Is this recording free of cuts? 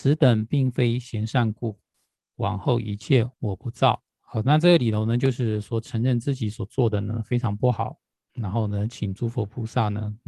no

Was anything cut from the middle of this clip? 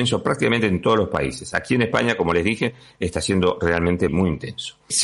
yes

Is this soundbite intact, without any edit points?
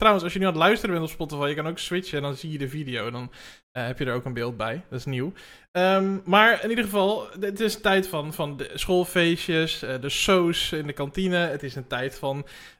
yes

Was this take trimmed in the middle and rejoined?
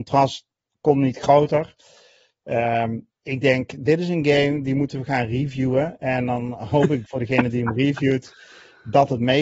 yes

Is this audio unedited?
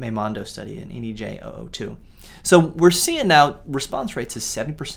yes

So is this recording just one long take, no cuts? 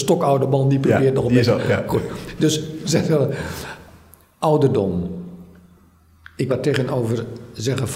no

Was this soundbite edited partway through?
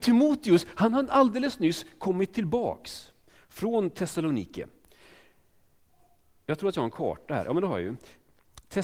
no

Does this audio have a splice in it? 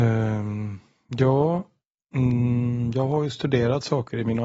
no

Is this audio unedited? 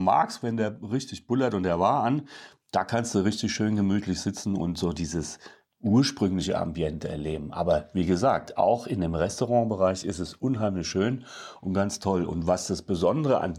yes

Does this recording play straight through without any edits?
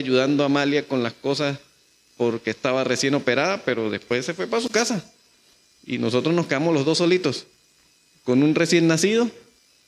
yes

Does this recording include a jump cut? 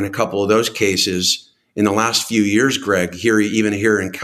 no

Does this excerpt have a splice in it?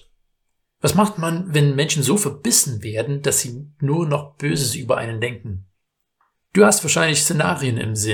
no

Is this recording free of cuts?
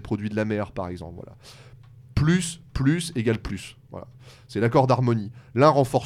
yes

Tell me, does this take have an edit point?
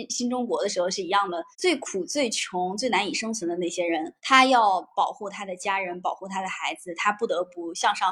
yes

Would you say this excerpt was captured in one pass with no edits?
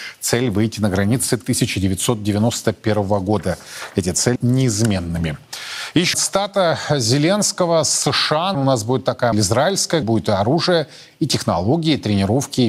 no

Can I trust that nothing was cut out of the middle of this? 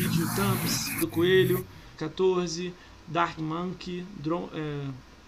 no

